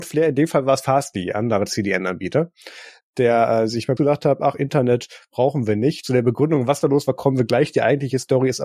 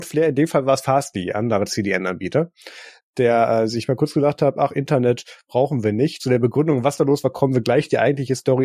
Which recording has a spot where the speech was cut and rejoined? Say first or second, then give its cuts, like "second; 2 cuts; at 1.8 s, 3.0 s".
first; 1 cut; at 4.0 s